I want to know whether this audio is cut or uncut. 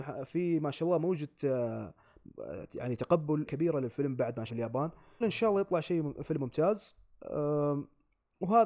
cut